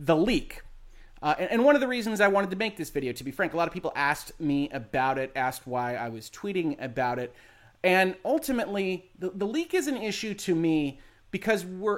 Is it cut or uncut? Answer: uncut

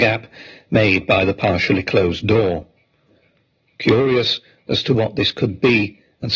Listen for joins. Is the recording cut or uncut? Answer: uncut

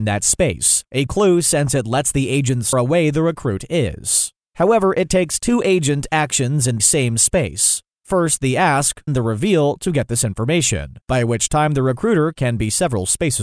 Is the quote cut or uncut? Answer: cut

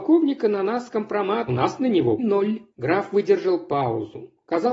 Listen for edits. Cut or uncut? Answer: cut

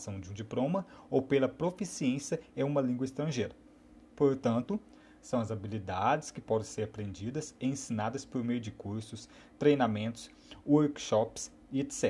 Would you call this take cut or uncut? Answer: uncut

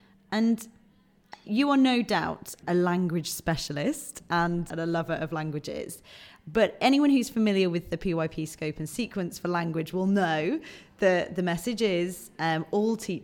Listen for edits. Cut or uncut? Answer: cut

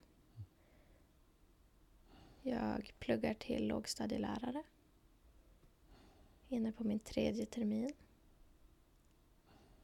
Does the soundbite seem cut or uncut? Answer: uncut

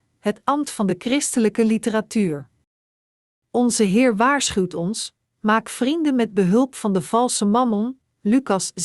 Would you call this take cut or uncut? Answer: uncut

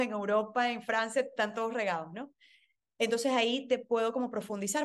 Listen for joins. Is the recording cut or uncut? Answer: uncut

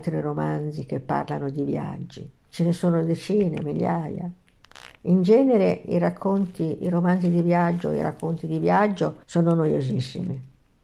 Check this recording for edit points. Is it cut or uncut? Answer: cut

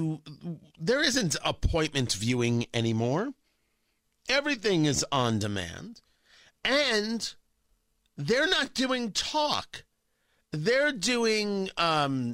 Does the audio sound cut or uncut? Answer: uncut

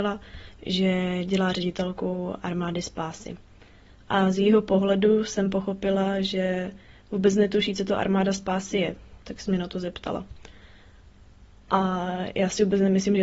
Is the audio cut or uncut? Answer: uncut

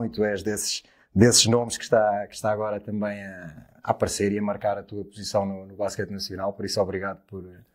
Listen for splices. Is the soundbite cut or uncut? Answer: uncut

